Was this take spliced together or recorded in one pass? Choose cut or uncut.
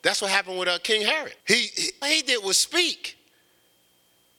cut